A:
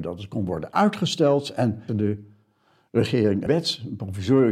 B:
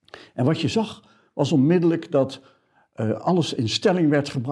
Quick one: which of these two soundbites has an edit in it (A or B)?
A